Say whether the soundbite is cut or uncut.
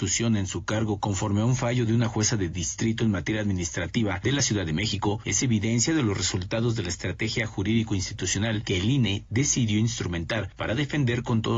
uncut